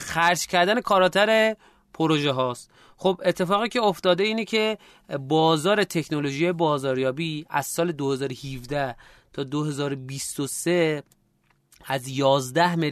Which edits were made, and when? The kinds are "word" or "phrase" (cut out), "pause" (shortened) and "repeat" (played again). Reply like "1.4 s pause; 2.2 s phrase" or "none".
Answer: none